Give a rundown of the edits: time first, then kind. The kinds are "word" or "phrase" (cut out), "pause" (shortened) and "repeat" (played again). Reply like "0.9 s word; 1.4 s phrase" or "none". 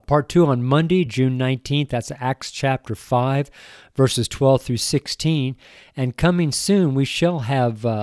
none